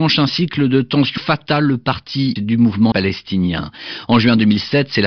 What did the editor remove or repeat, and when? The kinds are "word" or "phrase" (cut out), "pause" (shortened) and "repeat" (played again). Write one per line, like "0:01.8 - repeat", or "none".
0:01.2 - phrase
0:02.4 - word
0:02.9 - word